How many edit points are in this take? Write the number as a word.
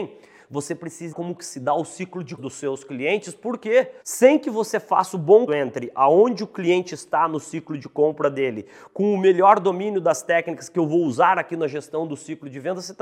four